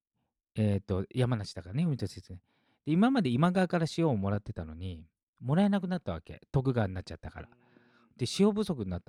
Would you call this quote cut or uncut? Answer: uncut